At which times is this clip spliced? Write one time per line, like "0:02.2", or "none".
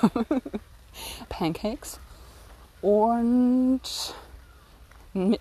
0:01.3